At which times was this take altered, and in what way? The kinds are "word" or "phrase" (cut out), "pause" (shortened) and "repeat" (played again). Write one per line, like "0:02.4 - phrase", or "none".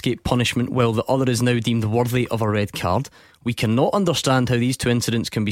none